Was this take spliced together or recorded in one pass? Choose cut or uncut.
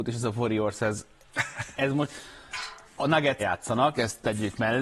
cut